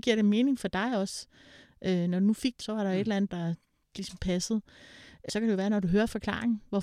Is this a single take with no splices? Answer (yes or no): no